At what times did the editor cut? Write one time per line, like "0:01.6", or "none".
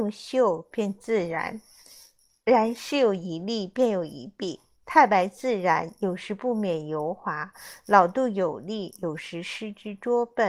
none

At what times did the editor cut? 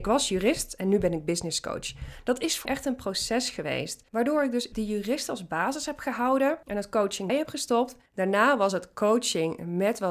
0:02.7
0:04.1
0:04.7
0:06.6
0:07.3
0:08.1

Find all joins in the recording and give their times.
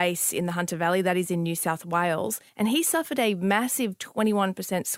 0:02.5

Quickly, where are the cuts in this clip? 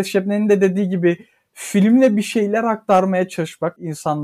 none

